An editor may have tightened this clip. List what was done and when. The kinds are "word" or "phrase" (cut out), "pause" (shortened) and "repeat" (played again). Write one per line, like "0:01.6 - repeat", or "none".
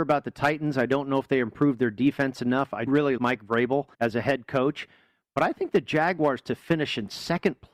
0:02.9 - word
0:03.2 - word
0:03.9 - pause